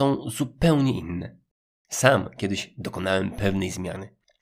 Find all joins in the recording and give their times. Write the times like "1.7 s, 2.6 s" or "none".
none